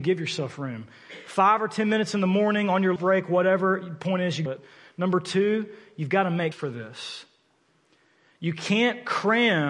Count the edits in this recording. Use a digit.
3